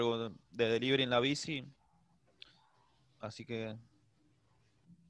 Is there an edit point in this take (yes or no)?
no